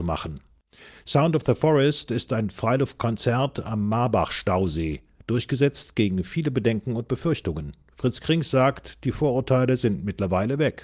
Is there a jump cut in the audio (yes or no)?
no